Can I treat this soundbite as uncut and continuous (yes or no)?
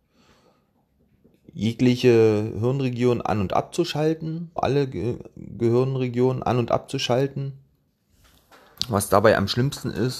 no